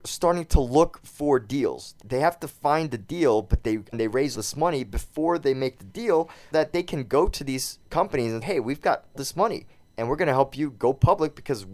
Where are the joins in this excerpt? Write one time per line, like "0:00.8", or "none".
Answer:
0:02.0
0:03.9
0:04.3
0:06.5
0:08.4
0:09.1